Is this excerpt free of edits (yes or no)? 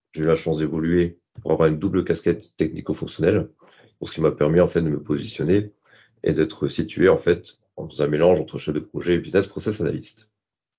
yes